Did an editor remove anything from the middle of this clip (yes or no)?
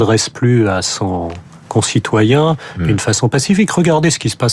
no